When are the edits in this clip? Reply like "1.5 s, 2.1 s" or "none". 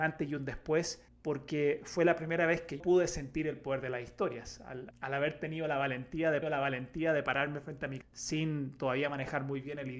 1.1 s, 2.8 s, 4.9 s, 6.4 s, 8.0 s